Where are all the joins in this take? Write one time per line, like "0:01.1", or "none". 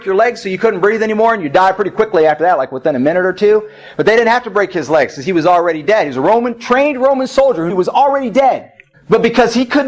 0:07.7
0:08.9